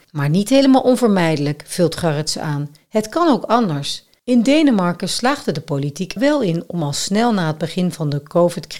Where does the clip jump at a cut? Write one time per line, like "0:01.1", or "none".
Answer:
0:06.2